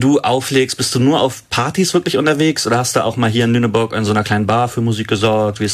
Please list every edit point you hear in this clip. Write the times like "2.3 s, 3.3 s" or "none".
none